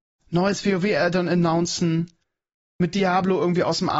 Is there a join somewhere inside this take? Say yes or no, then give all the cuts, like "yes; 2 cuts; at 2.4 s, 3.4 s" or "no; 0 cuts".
no; 0 cuts